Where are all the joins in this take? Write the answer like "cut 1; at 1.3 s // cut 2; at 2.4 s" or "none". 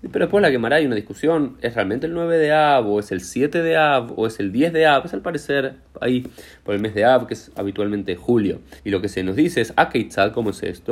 cut 1; at 8.8 s